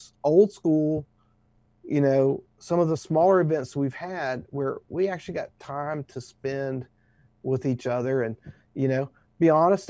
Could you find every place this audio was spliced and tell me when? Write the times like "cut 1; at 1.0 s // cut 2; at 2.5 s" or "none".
none